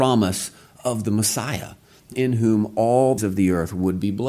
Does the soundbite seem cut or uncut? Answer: cut